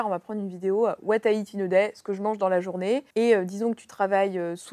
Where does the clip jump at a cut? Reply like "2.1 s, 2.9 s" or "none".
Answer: 3.1 s